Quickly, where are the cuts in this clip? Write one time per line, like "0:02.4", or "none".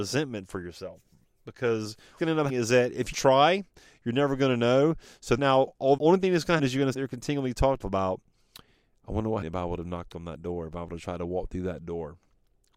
0:02.2
0:02.5
0:03.1
0:05.4
0:06.0
0:06.6
0:06.9
0:07.8
0:09.4